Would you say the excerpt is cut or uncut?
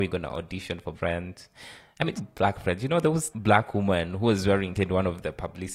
cut